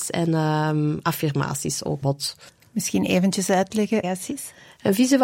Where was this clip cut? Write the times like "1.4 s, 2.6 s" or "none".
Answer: 2.0 s, 2.5 s, 4.0 s